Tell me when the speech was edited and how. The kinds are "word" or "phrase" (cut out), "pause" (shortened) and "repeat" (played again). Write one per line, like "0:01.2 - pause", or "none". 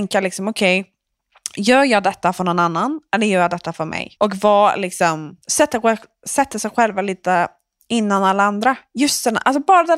0:04.2 - pause
0:05.4 - pause